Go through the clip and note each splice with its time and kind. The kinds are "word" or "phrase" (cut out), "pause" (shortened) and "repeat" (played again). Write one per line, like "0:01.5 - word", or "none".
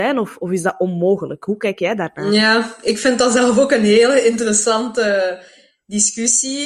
none